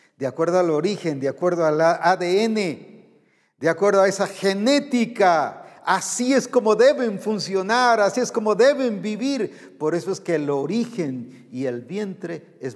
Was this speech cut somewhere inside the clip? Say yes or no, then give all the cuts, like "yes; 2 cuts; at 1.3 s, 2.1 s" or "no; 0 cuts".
no; 0 cuts